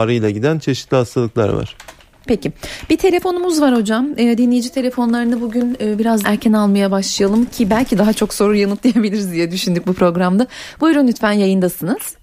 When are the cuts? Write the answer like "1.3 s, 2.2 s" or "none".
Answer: 6.2 s